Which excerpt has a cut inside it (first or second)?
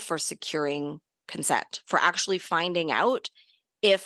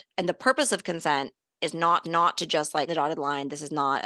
second